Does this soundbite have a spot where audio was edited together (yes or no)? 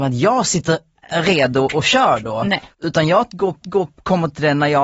yes